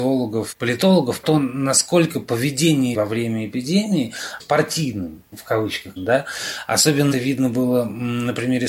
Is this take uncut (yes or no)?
no